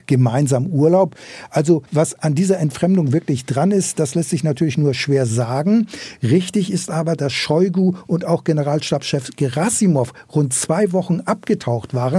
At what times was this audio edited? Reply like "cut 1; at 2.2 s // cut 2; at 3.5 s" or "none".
cut 1; at 1.9 s